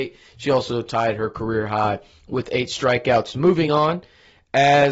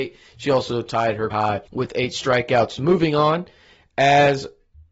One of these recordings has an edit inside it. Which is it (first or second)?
second